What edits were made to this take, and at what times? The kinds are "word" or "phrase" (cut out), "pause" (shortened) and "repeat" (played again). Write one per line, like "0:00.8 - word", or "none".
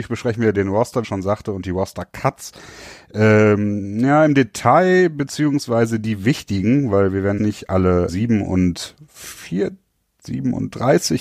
0:01.0 - phrase
0:07.4 - word
0:08.1 - word